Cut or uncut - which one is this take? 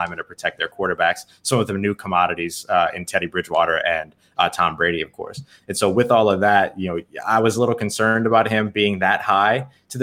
uncut